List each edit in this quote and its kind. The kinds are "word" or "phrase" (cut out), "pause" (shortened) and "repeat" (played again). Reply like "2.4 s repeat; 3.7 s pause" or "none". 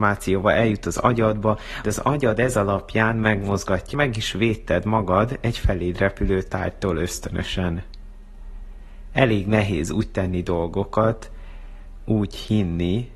1.8 s word; 3.9 s phrase